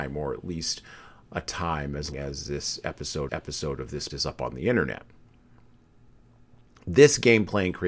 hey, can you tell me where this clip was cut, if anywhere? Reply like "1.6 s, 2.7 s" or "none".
2.1 s, 3.3 s, 4.1 s

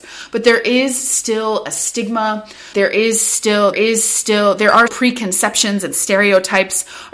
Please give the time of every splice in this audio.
2.7 s, 3.7 s, 4.9 s

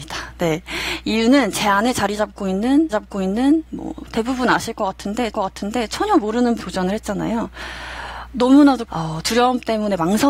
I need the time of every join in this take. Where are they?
2.9 s, 5.3 s, 6.6 s, 8.9 s

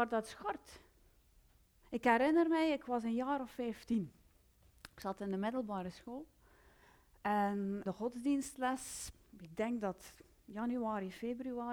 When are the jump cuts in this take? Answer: 7.9 s

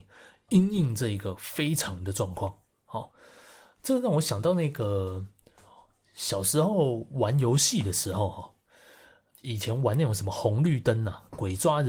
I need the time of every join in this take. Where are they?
none

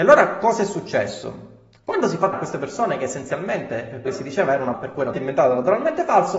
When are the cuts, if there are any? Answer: 2.3 s, 4.1 s, 4.7 s, 5.1 s

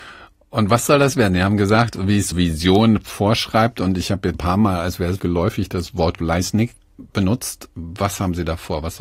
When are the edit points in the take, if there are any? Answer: 2.3 s, 4.3 s, 5.2 s, 6.2 s

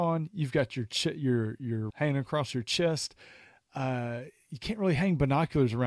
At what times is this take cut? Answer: 1.9 s

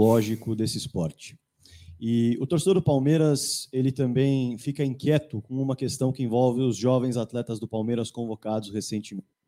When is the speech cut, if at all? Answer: none

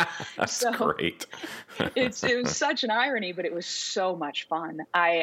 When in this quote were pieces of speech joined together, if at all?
none

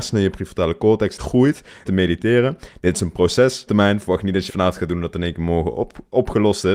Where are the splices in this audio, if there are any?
1.2 s, 1.9 s, 3.7 s, 4.5 s

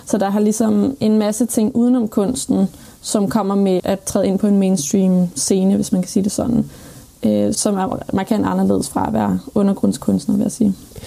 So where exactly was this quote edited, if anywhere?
3.8 s, 7.5 s

